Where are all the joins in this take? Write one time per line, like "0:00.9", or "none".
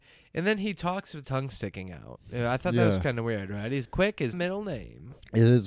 0:01.2
0:03.8
0:04.3